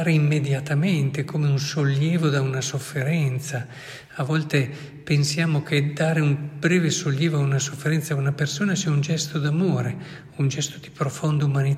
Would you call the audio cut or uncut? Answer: uncut